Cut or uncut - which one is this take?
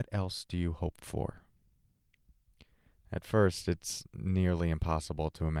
uncut